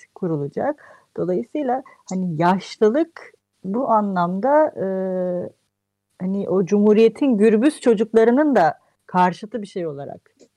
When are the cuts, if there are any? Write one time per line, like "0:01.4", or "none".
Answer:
none